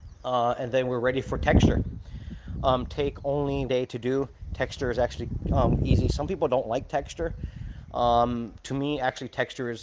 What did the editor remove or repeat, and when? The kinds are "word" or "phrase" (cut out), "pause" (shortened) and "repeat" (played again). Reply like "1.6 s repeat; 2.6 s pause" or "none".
2.9 s phrase; 3.7 s word; 5.8 s word